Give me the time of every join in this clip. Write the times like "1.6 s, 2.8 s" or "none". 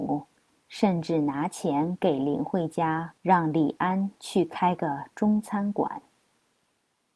3.2 s